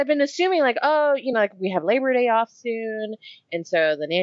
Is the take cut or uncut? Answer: uncut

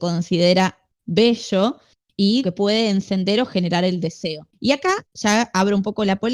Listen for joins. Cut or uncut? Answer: cut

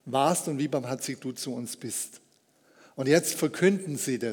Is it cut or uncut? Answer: uncut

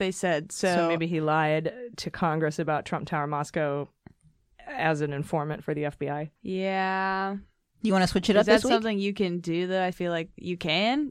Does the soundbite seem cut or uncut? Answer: cut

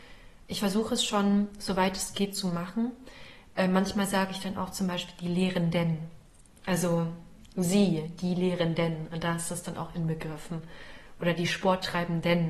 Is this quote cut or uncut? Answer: uncut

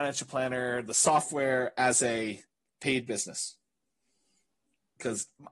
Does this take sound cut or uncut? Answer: uncut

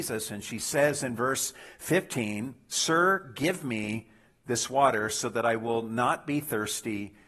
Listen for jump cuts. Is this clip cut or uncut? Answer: uncut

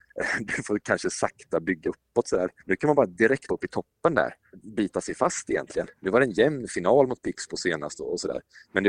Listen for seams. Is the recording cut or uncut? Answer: cut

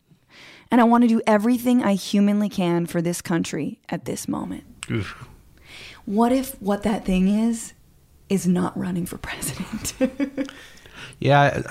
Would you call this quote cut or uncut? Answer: uncut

